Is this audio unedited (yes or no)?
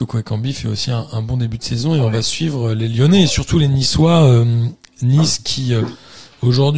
yes